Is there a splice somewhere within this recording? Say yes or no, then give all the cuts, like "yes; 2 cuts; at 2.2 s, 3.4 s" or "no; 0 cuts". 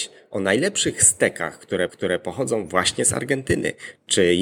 yes; 1 cut; at 1.9 s